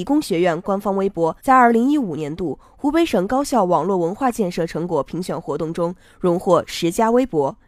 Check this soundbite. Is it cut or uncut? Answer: cut